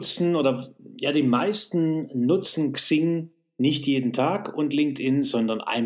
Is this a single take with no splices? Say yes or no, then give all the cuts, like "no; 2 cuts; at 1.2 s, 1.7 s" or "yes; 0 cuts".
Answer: yes; 0 cuts